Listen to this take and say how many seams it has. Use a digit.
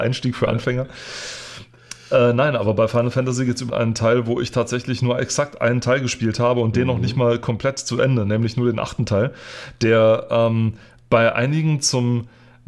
1